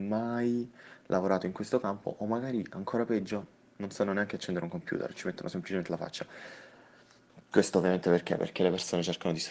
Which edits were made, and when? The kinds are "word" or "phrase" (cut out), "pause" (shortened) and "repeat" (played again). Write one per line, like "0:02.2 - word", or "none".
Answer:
none